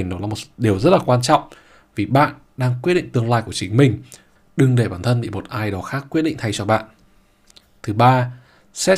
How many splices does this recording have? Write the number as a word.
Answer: zero